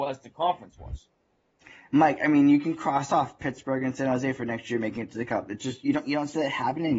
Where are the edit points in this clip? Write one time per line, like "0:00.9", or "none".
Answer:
none